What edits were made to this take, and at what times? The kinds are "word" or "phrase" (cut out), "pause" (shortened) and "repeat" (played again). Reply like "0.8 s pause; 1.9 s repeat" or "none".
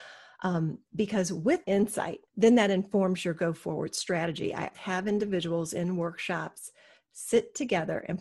1.6 s word; 2.3 s pause; 4.7 s word